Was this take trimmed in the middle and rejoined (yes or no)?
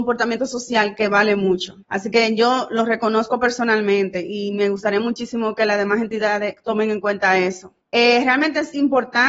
yes